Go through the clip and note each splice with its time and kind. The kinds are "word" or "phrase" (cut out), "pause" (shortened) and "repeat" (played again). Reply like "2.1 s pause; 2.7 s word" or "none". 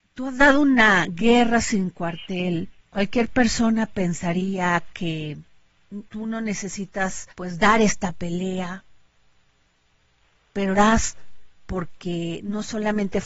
2.8 s pause; 6.1 s pause; 7.3 s pause; 10.7 s word